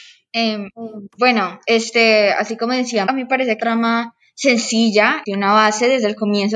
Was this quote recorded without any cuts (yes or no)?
no